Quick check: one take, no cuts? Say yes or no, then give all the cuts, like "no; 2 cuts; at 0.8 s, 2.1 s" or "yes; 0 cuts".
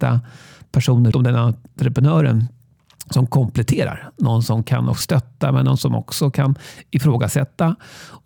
no; 2 cuts; at 1.1 s, 5.0 s